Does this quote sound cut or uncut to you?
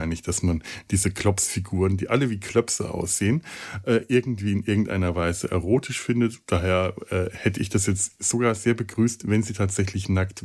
uncut